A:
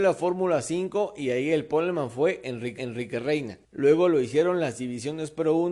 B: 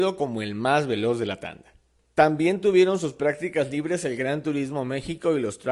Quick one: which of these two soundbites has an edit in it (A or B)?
A